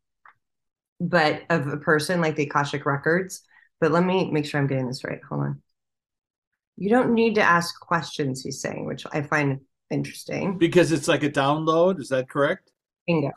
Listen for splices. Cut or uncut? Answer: uncut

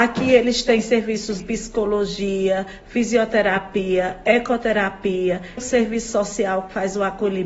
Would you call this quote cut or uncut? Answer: cut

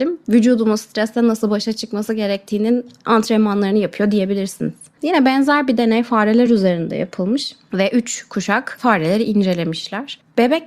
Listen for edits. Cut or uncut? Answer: uncut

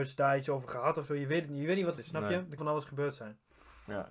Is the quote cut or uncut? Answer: cut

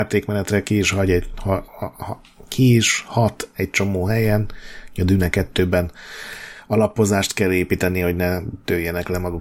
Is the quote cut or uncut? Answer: uncut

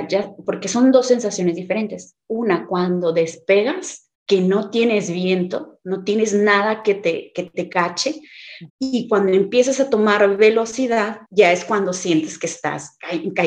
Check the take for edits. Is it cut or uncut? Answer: cut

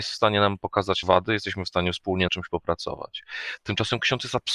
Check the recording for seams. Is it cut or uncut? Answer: cut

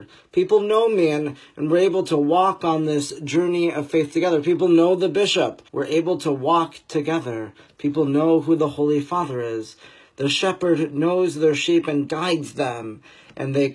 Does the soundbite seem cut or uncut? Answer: cut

